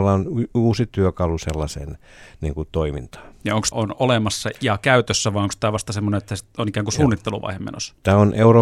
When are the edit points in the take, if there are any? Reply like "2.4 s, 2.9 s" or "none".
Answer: 3.7 s, 4.5 s